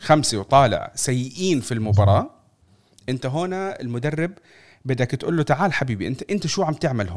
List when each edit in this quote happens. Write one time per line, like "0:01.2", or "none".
none